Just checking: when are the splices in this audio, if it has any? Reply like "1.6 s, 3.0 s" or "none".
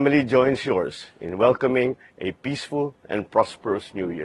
none